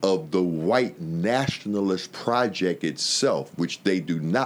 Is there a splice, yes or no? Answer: no